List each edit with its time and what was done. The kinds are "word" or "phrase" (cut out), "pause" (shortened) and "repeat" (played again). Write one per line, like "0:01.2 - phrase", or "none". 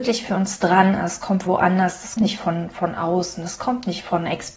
0:01.5 - word
0:02.2 - word